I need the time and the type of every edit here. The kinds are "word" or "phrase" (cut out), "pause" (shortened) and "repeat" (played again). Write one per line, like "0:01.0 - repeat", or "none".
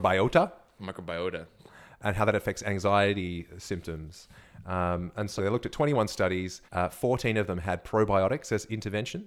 0:05.4 - word
0:06.7 - pause